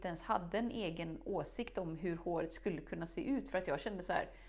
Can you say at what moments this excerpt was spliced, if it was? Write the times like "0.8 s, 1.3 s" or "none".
none

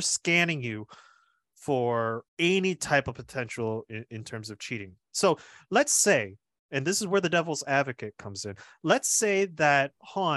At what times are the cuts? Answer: 2.3 s

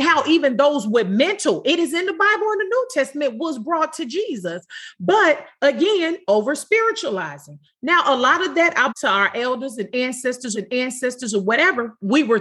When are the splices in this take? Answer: 8.9 s, 10.5 s

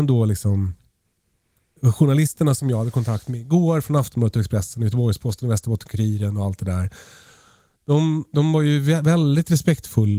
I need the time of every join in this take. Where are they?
none

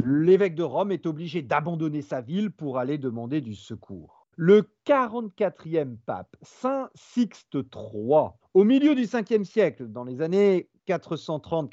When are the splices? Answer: 4.3 s, 8.4 s, 10.8 s

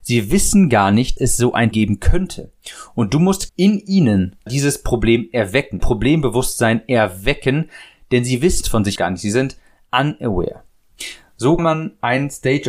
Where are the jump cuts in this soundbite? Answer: 1.2 s, 1.7 s, 3.5 s, 4.5 s, 5.8 s, 8.6 s, 9.0 s, 11.6 s

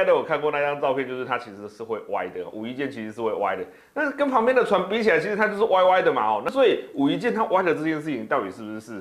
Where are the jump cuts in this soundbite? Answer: none

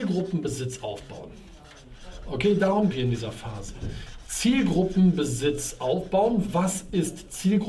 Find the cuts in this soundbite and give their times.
2.9 s

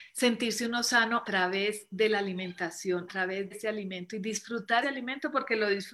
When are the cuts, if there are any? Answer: 1.2 s, 3.1 s, 3.5 s, 4.8 s

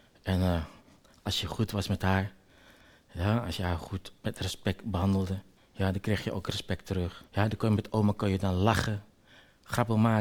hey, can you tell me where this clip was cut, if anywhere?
5.6 s, 7.3 s

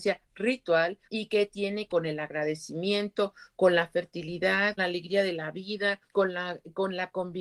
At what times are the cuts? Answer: 1.0 s, 1.9 s, 4.8 s, 6.1 s

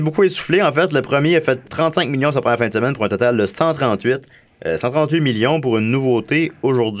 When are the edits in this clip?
1.6 s

